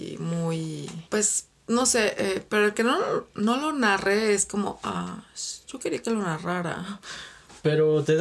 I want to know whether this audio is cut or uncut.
cut